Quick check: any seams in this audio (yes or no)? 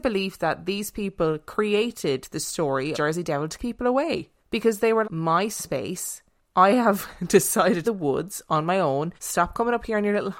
yes